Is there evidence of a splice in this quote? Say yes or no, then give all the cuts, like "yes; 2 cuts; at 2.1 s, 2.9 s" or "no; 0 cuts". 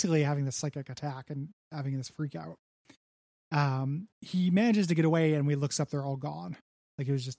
yes; 1 cut; at 4.1 s